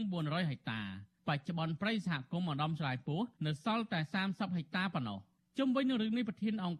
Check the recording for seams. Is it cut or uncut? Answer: cut